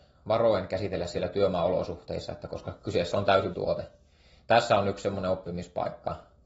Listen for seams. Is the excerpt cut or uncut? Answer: cut